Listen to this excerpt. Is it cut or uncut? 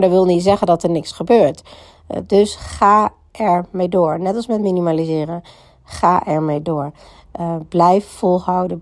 uncut